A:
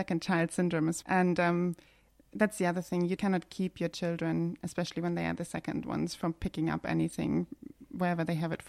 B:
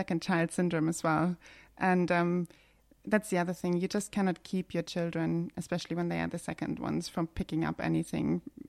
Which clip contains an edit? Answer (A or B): A